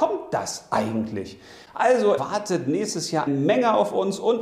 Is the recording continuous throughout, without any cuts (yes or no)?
no